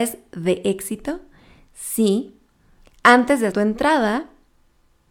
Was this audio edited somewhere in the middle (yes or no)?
yes